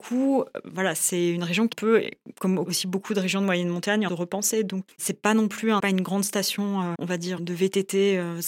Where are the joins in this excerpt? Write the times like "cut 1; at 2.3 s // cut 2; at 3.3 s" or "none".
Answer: cut 1; at 1.7 s // cut 2; at 4.1 s // cut 3; at 4.9 s // cut 4; at 5.8 s // cut 5; at 6.9 s // cut 6; at 7.4 s